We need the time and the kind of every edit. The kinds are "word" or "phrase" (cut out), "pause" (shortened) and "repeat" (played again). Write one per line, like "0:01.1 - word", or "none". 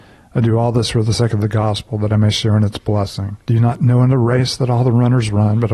0:03.4 - pause